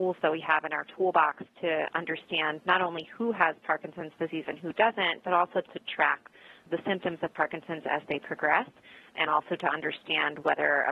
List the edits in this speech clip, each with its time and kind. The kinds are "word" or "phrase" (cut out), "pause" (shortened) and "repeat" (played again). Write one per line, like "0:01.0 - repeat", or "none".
none